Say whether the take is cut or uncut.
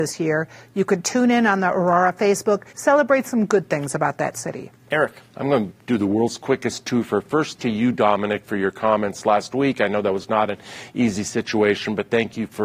cut